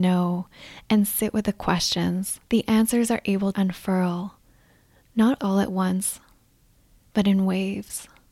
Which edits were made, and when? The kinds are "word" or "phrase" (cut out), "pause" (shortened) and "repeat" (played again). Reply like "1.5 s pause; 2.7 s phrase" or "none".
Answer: 2.4 s pause; 3.5 s word; 5.4 s word